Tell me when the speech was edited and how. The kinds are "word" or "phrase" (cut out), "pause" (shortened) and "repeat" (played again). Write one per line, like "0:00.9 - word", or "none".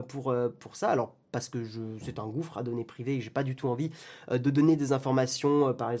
none